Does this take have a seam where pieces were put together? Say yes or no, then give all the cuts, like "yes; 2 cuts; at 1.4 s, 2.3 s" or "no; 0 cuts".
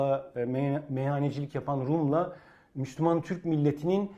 no; 0 cuts